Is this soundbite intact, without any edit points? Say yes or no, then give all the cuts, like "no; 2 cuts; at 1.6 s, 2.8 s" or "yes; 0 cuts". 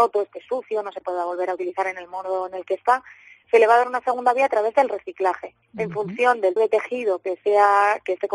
no; 2 cuts; at 5.6 s, 6.6 s